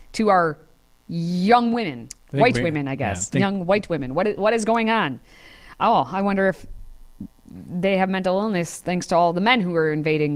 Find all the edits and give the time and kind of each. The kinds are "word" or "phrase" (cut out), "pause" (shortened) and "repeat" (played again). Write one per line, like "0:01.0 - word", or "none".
none